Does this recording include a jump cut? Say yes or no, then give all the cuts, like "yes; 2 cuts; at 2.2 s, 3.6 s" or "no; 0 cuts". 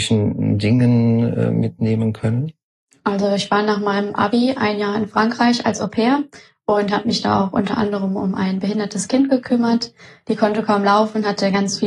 no; 0 cuts